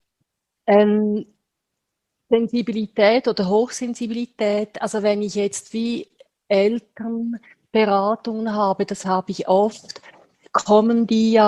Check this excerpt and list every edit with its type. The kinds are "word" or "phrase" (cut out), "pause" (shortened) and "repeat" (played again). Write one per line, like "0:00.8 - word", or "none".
none